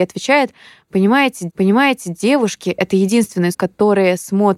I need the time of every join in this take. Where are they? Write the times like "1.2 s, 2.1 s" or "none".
1.5 s, 3.5 s